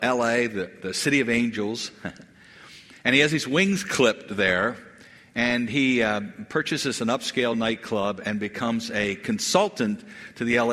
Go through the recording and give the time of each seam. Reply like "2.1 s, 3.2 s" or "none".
none